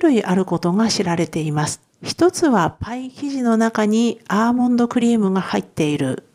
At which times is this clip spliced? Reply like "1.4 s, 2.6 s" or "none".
1.9 s